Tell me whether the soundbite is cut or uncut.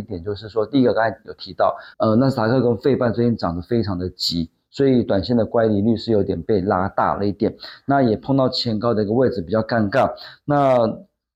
cut